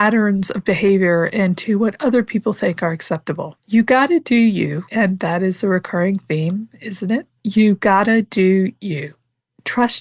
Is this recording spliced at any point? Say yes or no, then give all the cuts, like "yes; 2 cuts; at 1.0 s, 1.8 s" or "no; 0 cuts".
yes; 2 cuts; at 3.6 s, 7.4 s